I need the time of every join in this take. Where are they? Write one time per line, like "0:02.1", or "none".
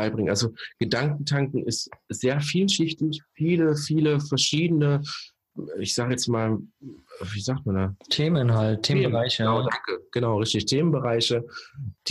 0:08.0